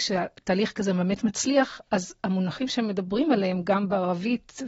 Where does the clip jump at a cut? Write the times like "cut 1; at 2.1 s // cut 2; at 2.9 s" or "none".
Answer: none